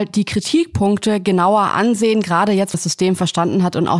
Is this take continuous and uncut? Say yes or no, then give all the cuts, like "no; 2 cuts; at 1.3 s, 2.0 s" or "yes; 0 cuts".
no; 1 cut; at 2.7 s